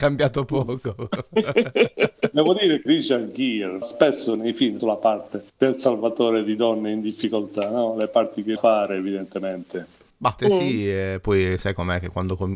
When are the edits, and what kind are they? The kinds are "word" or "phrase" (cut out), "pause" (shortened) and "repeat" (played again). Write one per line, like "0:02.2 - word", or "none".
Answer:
0:02.9 - word
0:03.8 - word
0:04.8 - phrase
0:05.5 - pause
0:08.6 - phrase
0:10.4 - word